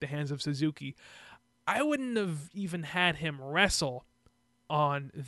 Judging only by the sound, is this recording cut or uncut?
uncut